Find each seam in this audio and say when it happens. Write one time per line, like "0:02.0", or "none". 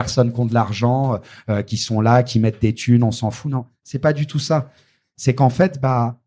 none

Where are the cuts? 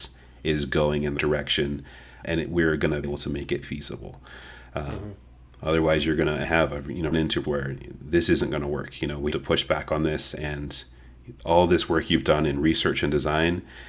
0:01.2
0:02.2
0:03.0
0:03.6
0:06.4
0:07.1
0:07.4
0:09.3

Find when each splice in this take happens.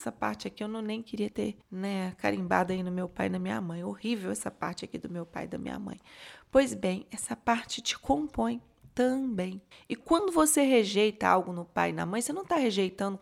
0:01.6
0:09.7

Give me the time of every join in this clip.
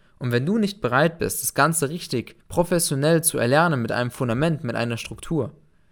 0:02.4

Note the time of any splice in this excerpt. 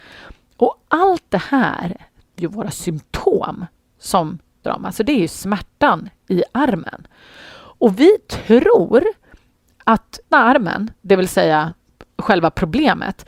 0:02.4
0:03.7
0:04.6
0:10.3
0:11.0

